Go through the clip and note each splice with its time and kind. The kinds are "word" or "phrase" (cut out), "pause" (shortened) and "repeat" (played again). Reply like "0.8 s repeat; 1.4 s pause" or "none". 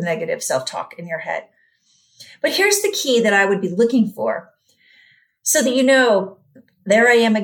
none